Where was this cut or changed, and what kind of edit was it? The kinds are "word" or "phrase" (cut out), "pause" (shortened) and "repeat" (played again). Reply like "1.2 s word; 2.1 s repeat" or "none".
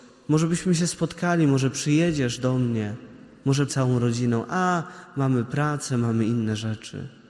3.7 s word